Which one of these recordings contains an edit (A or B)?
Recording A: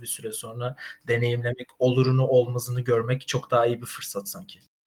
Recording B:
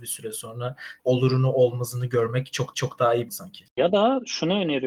B